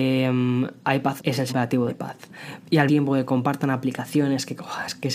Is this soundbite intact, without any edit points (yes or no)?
no